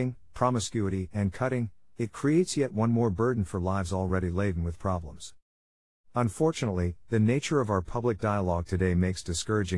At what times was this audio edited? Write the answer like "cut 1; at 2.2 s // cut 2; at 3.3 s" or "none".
none